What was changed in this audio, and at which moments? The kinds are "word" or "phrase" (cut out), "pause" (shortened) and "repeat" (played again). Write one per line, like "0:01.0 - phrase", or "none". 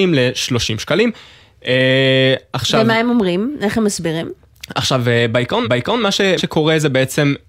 0:05.6 - repeat
0:06.4 - word